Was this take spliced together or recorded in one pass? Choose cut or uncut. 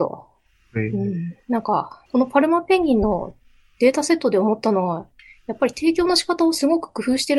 cut